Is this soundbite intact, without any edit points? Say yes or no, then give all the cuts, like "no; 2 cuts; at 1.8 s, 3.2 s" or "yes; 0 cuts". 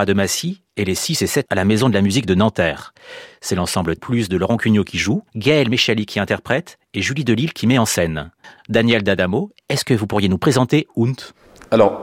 no; 4 cuts; at 1.5 s, 4.0 s, 5.3 s, 8.4 s